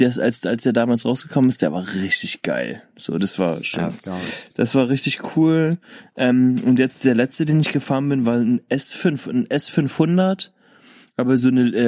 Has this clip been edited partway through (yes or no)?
no